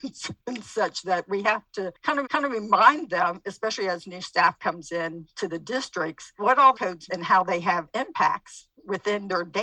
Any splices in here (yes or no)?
yes